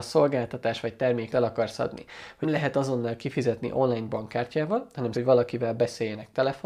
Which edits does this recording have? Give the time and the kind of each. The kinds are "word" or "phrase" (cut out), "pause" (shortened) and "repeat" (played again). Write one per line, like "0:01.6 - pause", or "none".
0:01.3 - word
0:02.4 - word
0:05.1 - word